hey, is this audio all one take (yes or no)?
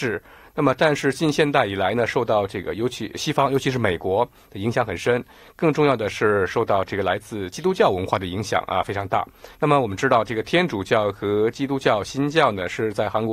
no